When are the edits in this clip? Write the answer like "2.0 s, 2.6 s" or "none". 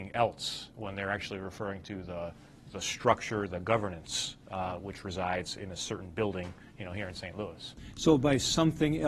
none